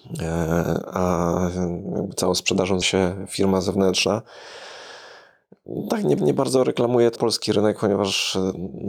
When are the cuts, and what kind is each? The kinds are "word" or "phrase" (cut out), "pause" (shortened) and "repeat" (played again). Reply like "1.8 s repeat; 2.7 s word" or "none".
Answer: 2.8 s word; 6.2 s repeat; 7.2 s word